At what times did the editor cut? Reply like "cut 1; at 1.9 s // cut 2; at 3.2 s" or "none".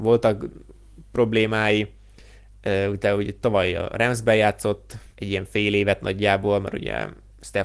cut 1; at 5.1 s